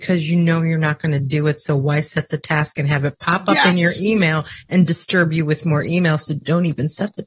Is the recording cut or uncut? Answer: uncut